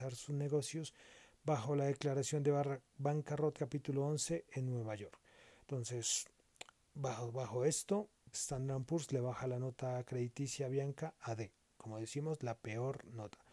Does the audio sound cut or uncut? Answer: cut